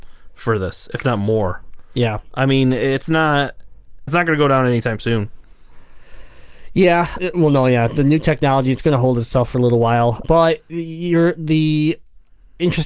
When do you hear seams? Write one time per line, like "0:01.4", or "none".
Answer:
0:04.1
0:07.2
0:10.2